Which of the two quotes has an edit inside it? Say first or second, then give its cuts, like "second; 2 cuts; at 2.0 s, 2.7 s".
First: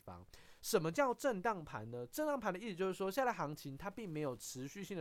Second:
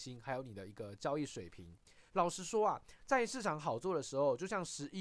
second; 1 cut; at 2.1 s